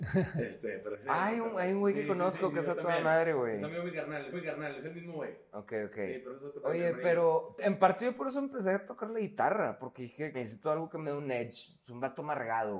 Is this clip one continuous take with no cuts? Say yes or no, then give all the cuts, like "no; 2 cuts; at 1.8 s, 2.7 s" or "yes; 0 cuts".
no; 3 cuts; at 4.3 s, 6.3 s, 10.3 s